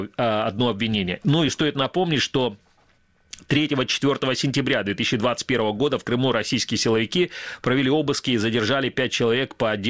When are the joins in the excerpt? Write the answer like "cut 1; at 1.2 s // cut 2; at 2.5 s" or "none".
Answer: none